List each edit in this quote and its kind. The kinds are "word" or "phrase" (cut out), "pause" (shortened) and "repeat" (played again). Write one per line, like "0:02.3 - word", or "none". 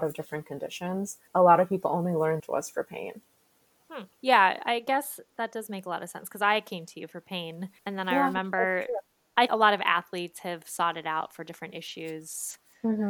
0:01.3 - pause
0:02.4 - phrase
0:04.1 - pause
0:07.8 - pause
0:09.5 - word